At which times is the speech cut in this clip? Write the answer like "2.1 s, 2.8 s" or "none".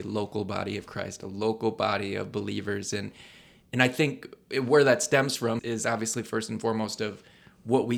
5.6 s